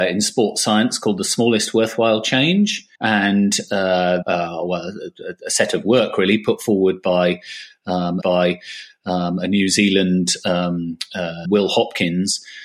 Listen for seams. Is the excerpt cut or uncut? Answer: cut